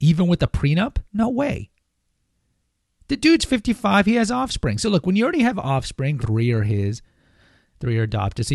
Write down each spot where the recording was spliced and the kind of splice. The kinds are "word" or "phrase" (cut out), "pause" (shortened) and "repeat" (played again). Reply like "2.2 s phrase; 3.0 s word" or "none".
1.1 s pause; 6.2 s word